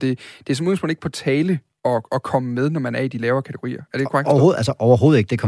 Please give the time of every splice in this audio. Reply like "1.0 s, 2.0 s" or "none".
none

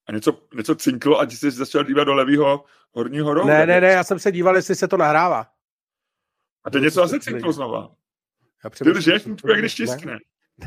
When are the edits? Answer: none

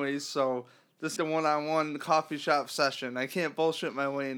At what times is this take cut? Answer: 1.2 s

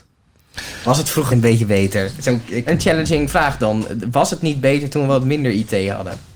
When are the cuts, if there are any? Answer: 1.3 s, 2.7 s

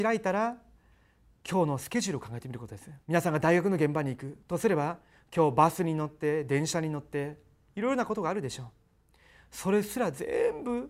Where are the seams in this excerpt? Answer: 3.0 s

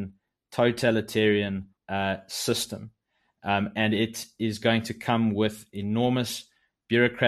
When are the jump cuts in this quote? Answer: 1.8 s

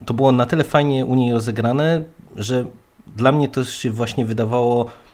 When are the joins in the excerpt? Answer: none

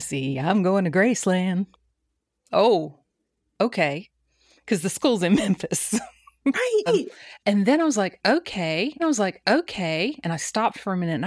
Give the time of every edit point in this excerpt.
6.5 s, 6.9 s, 9.0 s

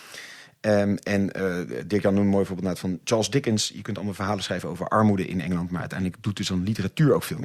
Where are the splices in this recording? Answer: none

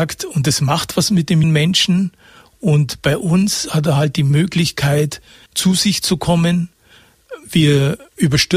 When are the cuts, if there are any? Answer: 1.4 s, 5.5 s

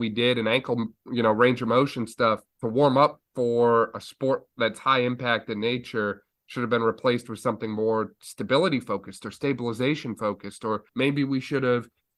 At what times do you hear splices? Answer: 2.5 s, 10.9 s

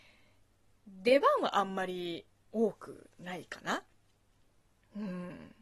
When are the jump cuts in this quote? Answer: none

